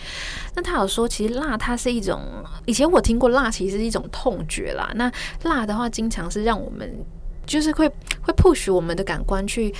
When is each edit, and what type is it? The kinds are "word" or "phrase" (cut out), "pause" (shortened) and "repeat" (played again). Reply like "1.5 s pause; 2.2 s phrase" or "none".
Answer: 2.6 s word